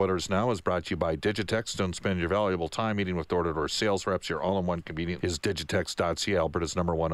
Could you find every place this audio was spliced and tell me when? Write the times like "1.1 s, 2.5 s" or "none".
5.2 s